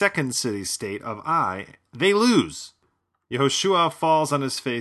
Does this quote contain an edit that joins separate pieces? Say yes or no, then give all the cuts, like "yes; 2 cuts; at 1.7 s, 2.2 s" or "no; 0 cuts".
no; 0 cuts